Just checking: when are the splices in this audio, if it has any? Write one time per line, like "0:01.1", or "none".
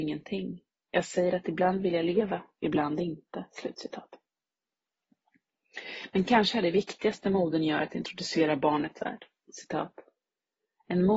0:09.0